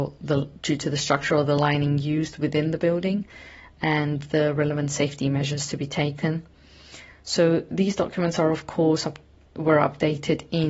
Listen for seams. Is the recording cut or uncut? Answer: uncut